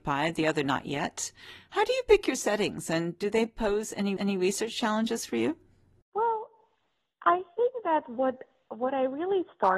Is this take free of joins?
no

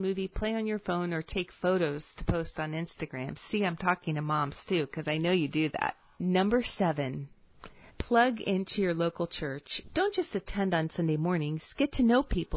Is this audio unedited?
no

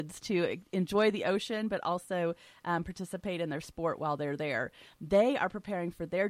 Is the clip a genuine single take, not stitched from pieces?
yes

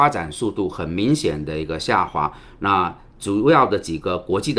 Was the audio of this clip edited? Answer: no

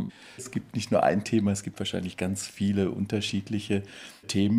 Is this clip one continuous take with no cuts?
yes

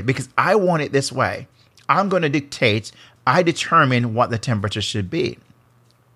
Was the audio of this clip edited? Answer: no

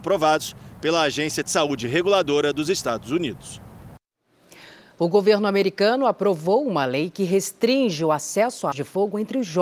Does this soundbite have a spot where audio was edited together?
yes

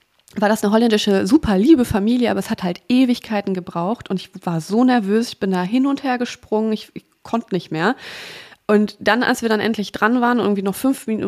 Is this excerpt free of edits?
yes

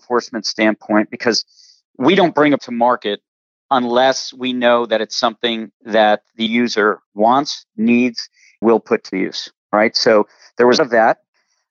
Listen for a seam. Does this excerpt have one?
yes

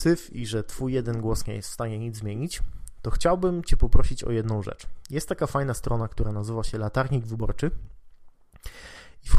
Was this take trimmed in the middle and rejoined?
no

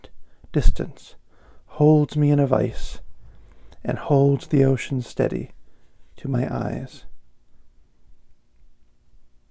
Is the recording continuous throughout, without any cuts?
yes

